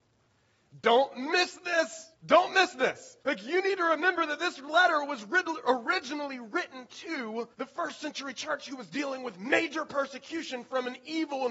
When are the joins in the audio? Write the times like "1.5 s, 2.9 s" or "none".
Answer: 2.2 s, 3.2 s, 7.5 s

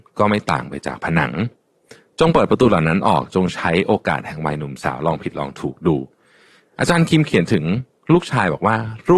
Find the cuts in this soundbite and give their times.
none

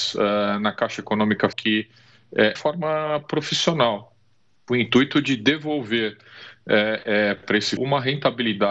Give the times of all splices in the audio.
1.5 s, 2.6 s, 4.7 s, 7.4 s, 7.8 s

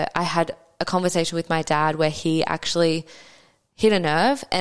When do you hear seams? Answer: none

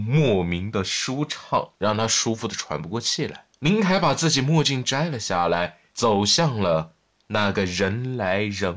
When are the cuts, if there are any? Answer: 1.7 s, 3.5 s, 5.9 s

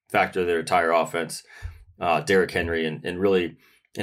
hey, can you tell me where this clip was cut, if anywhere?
none

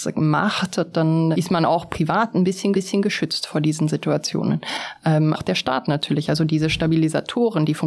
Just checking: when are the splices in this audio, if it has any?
1.3 s, 2.7 s, 5.3 s

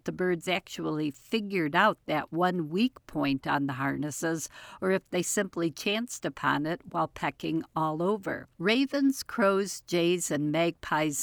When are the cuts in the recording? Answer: 8.5 s

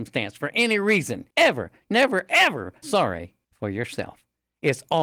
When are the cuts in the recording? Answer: 1.3 s, 2.8 s, 3.4 s

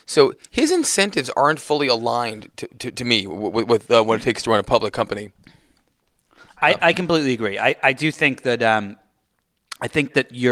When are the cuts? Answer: none

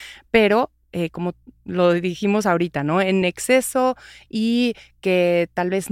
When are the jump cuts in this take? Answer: none

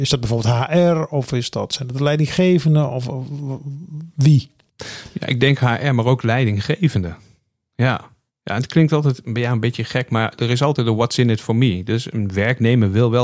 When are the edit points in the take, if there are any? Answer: none

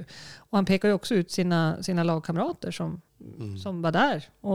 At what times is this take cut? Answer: 3.1 s

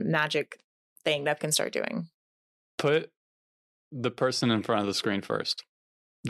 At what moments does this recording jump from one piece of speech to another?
1.4 s, 2.5 s

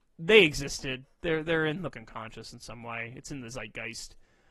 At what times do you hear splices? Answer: 1.9 s

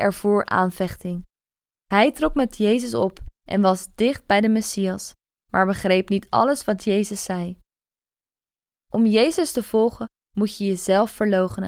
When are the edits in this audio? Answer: none

